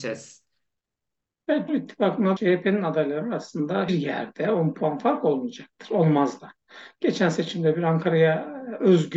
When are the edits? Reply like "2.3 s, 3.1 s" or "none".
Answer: 1.7 s, 2.4 s, 3.9 s